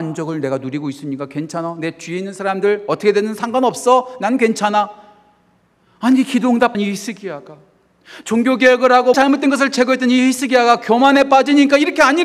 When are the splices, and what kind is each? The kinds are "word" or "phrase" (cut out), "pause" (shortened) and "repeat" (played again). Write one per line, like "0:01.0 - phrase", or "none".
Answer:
0:06.7 - word
0:09.1 - word